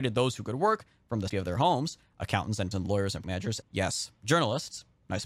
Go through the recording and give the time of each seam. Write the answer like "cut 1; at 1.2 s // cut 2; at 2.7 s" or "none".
cut 1; at 1.3 s // cut 2; at 2.7 s // cut 3; at 3.2 s // cut 4; at 3.6 s